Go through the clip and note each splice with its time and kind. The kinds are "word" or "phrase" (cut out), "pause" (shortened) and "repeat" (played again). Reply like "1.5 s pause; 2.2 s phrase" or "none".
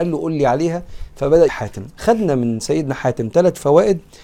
1.5 s word